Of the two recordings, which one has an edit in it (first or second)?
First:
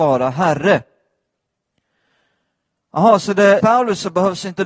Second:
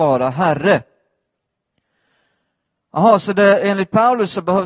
first